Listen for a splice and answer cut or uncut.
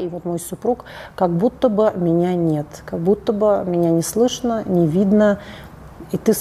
uncut